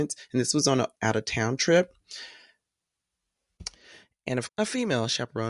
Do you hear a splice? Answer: yes; 2 cuts; at 1.0 s, 4.5 s

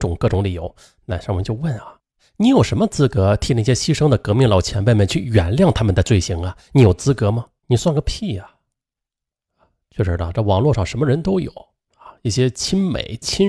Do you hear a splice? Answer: yes; 1 cut; at 7.6 s

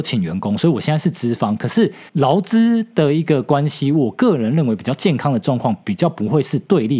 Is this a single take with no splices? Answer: no; 1 cut; at 2.1 s

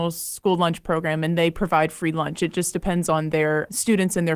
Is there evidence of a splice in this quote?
no; 0 cuts

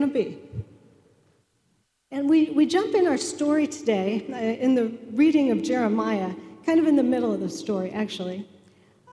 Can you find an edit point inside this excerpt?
no; 0 cuts

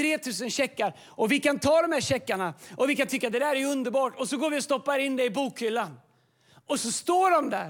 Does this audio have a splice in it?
no; 0 cuts

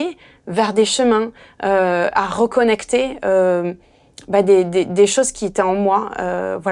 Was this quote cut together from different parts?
no; 0 cuts

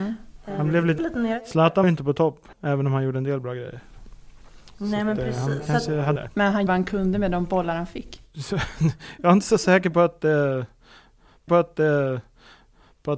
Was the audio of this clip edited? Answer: yes; 6 cuts; at 1.0 s, 1.8 s, 2.5 s, 6.2 s, 6.7 s, 11.5 s

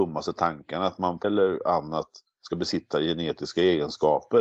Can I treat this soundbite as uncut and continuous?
no; 2 cuts; at 1.2 s, 2.9 s

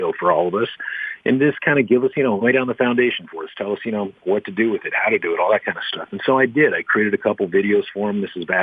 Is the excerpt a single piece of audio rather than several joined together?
no; 1 cut; at 2.4 s

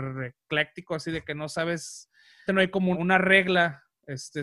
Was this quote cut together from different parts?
yes; 2 cuts; at 2.5 s, 2.9 s

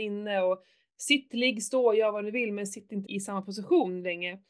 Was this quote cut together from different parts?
yes; 1 cut; at 3.0 s

